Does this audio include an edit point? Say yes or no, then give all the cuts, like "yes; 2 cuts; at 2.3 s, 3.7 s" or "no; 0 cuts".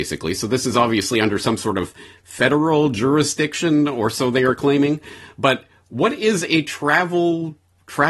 no; 0 cuts